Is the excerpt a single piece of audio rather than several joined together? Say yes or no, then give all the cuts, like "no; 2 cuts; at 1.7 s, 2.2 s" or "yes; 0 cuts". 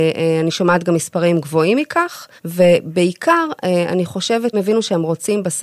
no; 2 cuts; at 2.4 s, 4.5 s